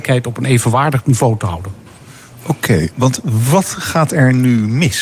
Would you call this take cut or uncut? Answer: uncut